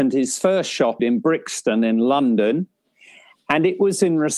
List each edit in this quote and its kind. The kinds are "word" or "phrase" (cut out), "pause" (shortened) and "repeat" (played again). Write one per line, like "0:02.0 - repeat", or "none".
0:01.0 - phrase